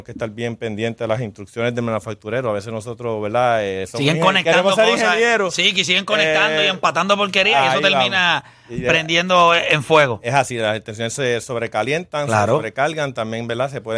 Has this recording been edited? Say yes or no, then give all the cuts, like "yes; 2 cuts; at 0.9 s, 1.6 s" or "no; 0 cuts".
no; 0 cuts